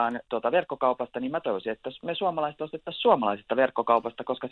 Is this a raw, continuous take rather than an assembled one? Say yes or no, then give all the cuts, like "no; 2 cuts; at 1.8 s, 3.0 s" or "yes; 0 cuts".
yes; 0 cuts